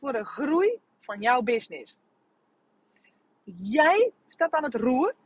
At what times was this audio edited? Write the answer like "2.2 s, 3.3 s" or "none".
none